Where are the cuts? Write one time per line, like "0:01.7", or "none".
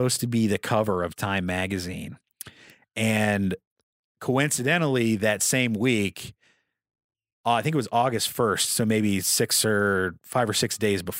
none